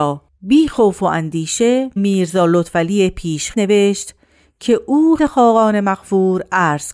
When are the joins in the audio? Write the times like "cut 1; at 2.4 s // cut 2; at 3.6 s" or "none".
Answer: cut 1; at 2.0 s // cut 2; at 3.5 s // cut 3; at 5.2 s